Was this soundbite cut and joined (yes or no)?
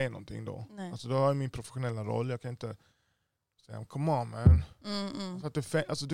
no